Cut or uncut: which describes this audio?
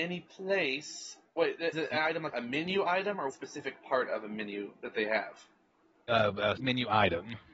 cut